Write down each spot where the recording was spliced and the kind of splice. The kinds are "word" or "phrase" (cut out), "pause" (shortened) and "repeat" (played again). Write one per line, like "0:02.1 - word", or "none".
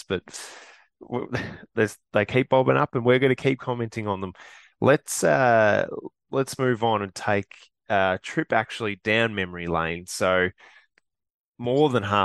0:02.0 - pause